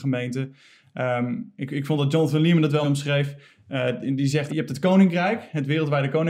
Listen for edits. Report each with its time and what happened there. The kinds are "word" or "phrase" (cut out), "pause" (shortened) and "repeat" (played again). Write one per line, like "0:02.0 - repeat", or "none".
0:02.8 - word
0:04.5 - phrase